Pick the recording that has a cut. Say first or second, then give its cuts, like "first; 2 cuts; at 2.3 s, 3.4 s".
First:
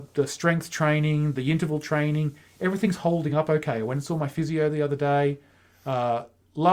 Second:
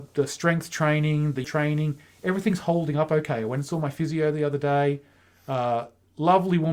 second; 1 cut; at 1.4 s